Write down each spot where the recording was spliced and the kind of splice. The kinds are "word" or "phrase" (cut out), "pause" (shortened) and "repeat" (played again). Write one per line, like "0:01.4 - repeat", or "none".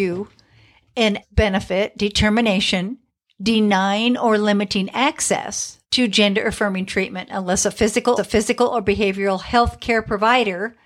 0:01.2 - word
0:03.1 - pause
0:05.8 - pause
0:08.2 - repeat